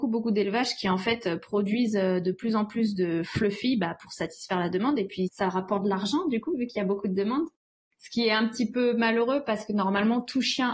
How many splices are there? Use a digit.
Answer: 0